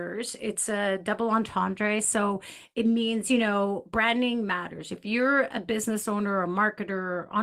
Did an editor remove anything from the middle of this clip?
no; 0 cuts

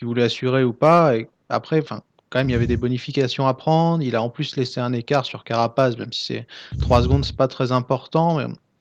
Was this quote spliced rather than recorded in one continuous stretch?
no; 0 cuts

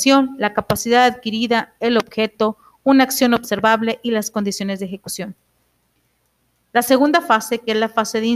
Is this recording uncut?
yes; 0 cuts

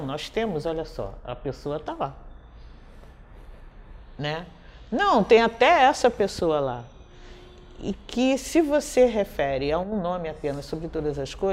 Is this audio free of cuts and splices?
yes; 0 cuts

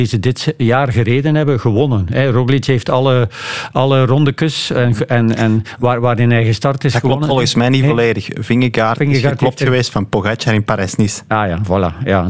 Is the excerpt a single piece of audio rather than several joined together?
yes; 0 cuts

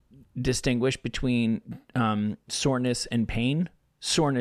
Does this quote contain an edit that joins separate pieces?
no; 0 cuts

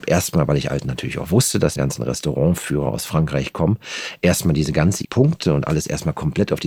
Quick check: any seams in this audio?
yes; 2 cuts; at 1.8 s, 5.0 s

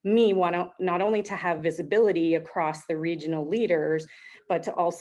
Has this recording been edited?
no; 0 cuts

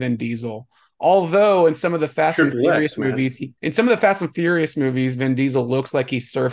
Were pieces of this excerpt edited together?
yes; 1 cut; at 3.6 s

